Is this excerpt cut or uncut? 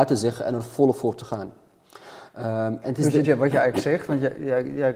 cut